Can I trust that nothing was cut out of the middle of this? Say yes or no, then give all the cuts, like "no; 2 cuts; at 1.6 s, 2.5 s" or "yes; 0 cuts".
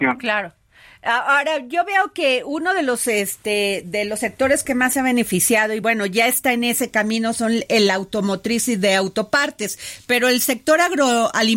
yes; 0 cuts